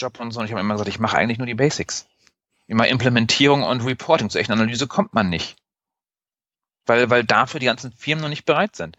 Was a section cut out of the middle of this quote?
no; 0 cuts

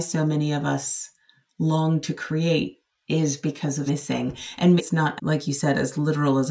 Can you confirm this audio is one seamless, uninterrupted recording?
no; 3 cuts; at 3.9 s, 4.8 s, 5.2 s

